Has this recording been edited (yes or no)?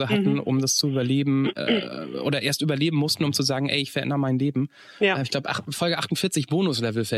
no